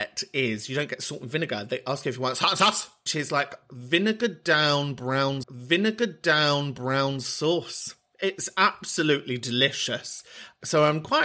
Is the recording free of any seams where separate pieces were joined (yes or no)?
no